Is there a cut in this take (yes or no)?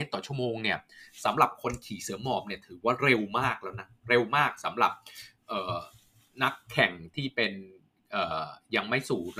no